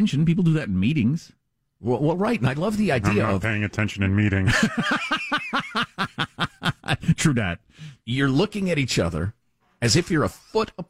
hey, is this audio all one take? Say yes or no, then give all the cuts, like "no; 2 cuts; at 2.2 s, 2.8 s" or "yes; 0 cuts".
yes; 0 cuts